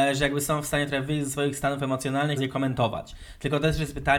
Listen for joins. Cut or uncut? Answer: cut